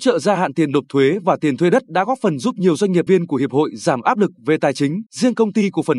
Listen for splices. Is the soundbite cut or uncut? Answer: cut